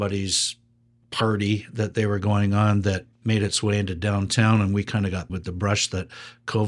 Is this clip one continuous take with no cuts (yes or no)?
no